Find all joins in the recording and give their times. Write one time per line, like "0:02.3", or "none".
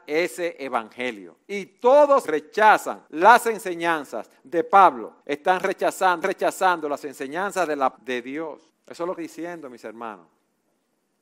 0:01.4
0:02.2
0:03.1
0:05.2
0:06.2
0:08.0
0:08.7
0:09.2